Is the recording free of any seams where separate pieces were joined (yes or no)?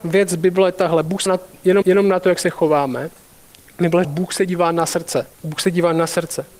no